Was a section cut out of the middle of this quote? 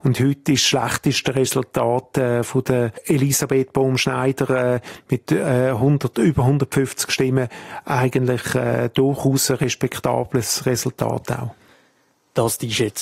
no; 0 cuts

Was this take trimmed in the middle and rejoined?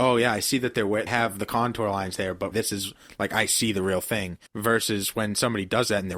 yes; 3 cuts; at 1.1 s, 2.5 s, 4.5 s

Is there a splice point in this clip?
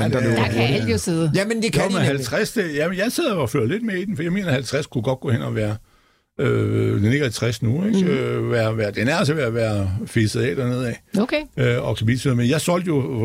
no; 0 cuts

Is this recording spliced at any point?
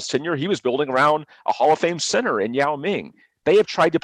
no; 0 cuts

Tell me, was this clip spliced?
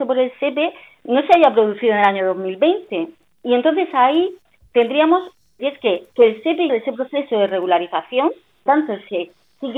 yes; 3 cuts; at 5.6 s, 6.7 s, 8.7 s

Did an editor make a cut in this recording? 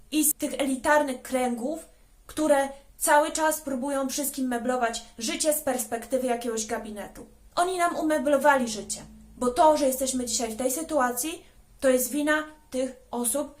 yes; 2 cuts; at 2.9 s, 7.5 s

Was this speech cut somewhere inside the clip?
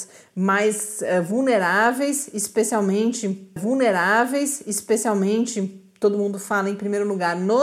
yes; 1 cut; at 3.6 s

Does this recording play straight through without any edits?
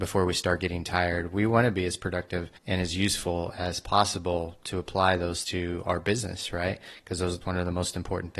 no; 3 cuts; at 2.6 s, 5.4 s, 7.4 s

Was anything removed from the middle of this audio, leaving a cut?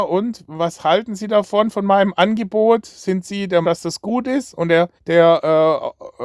yes; 2 cuts; at 3.6 s, 5.0 s

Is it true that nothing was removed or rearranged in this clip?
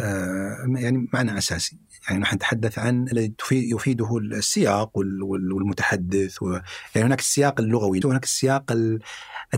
no; 2 cuts; at 3.1 s, 8.0 s

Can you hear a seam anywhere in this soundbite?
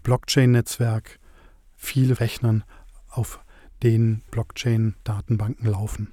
yes; 2 cuts; at 2.2 s, 4.3 s

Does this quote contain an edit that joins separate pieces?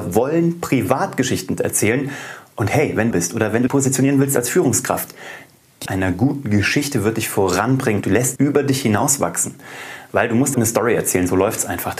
yes; 6 cuts; at 3.1 s, 3.7 s, 5.9 s, 8.0 s, 8.4 s, 10.5 s

